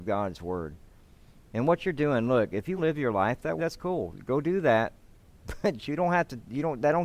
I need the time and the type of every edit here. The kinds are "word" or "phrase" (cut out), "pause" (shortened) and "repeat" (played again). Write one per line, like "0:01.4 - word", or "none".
0:02.8 - word
0:03.6 - word